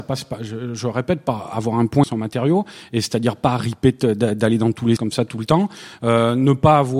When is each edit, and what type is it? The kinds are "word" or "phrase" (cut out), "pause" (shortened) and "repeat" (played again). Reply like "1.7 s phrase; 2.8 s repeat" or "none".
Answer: 2.0 s phrase; 5.0 s word

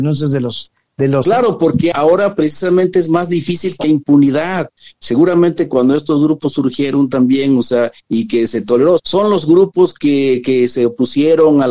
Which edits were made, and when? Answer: 1.2 s word; 1.9 s word; 3.8 s word; 9.0 s word

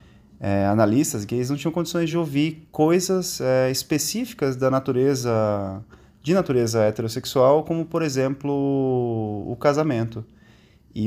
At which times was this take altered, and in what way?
none

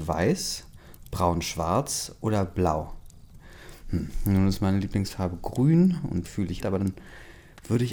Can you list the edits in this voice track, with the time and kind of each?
6.2 s word; 6.6 s phrase

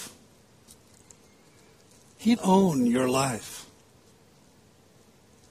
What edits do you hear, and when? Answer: 2.4 s word

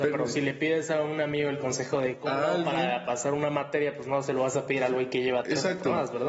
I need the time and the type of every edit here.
none

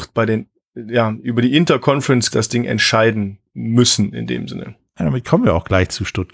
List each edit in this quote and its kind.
2.3 s word; 3.5 s pause

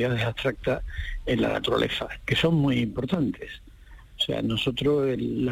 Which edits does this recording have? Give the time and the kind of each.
none

